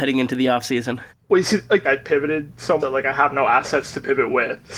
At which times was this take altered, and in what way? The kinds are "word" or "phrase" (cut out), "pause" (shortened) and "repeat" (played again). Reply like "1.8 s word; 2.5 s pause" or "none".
1.1 s pause; 1.8 s phrase; 2.8 s word